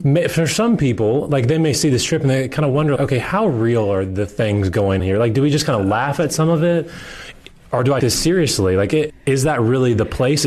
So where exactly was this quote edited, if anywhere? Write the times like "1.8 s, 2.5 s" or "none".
3.0 s, 5.0 s, 8.0 s, 9.1 s